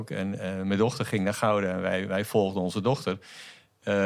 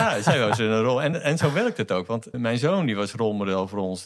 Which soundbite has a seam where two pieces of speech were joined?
second; 2 cuts; at 1.1 s, 2.3 s

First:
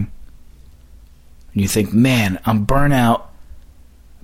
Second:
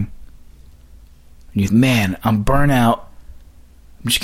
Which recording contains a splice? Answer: second; 1 cut; at 1.7 s

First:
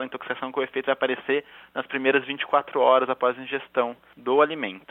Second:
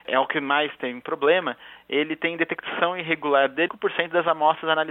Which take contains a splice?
second; 1 cut; at 3.7 s

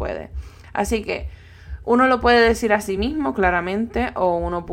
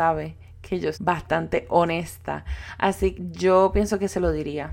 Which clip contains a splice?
second; 2 cuts; at 0.9 s, 3.1 s

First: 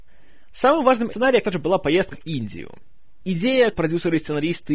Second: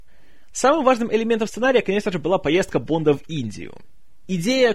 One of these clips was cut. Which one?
first; 4 cuts; at 1.1 s, 1.4 s, 2.1 s, 3.7 s

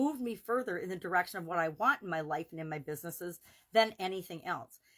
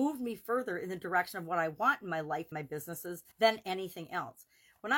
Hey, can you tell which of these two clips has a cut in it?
second; 2 cuts; at 2.5 s, 3.3 s

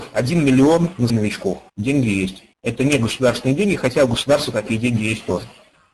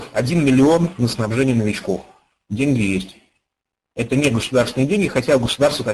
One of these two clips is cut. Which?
first; 3 cuts; at 1.1 s, 1.7 s, 2.5 s

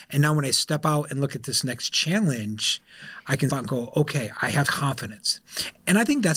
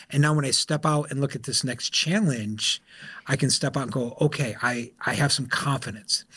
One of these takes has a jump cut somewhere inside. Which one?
first; 3 cuts; at 3.5 s, 4.3 s, 4.6 s

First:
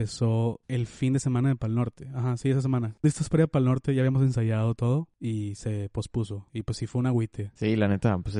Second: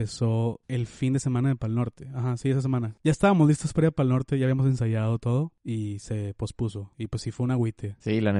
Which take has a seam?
first; 1 cut; at 3.0 s

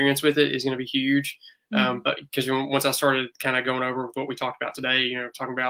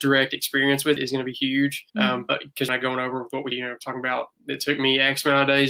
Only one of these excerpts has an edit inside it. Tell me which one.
second; 4 cuts; at 1.0 s, 1.9 s, 2.7 s, 3.5 s

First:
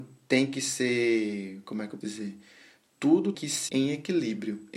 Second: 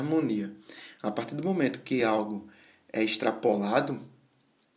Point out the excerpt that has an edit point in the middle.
first; 3 cuts; at 2.0 s, 3.3 s, 3.7 s

